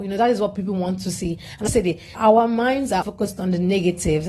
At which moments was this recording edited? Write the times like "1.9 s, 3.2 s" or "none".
1.7 s, 2.1 s, 3.0 s